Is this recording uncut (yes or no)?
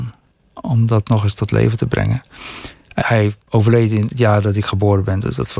no